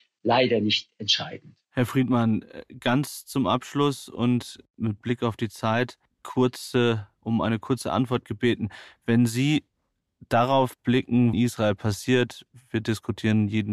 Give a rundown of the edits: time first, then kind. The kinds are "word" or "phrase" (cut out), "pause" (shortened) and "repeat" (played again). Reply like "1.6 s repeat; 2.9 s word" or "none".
1.6 s pause; 11.3 s phrase